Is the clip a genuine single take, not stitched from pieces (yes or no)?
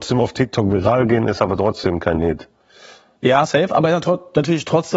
yes